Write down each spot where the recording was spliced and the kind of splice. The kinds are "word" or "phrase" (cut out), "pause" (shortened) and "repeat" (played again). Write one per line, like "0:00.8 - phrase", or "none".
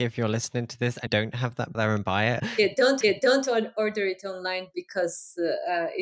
0:01.1 - word
0:01.7 - phrase
0:02.4 - word
0:03.0 - repeat

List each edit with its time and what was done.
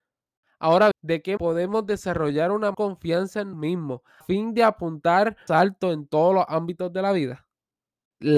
0:00.9 - word
0:01.4 - word
0:02.7 - word
0:03.5 - word
0:04.2 - word
0:05.5 - word

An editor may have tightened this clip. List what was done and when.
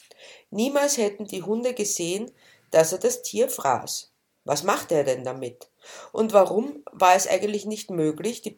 none

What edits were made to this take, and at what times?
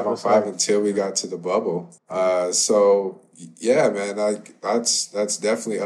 0:02.0 - pause

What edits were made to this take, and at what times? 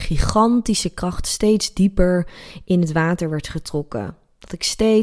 none

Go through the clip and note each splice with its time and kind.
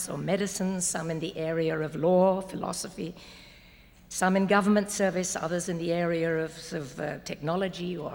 none

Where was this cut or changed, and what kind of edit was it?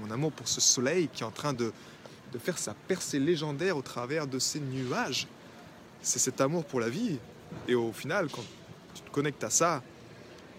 none

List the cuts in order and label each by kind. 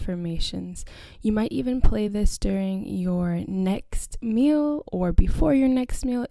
none

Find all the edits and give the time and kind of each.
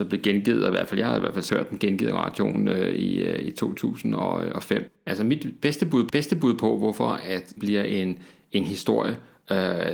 0:01.5 - word
0:06.1 - repeat
0:07.6 - word

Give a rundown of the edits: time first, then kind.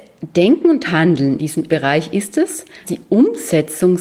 0:01.4 - word
0:01.7 - word
0:02.8 - word

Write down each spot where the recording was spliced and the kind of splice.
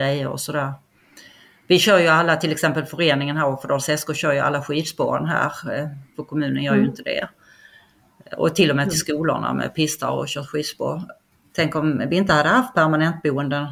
none

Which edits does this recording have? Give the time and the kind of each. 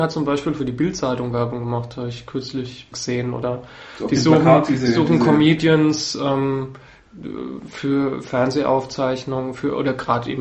0:02.9 - word

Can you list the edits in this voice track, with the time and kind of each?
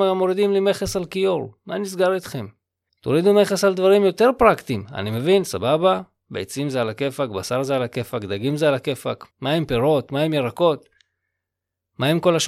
0:02.9 - pause
0:09.3 - pause

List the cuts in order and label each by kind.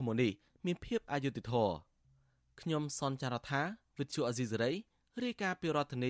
none

